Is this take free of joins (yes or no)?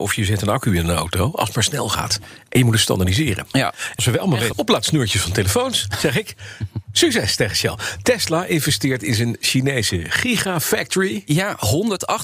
no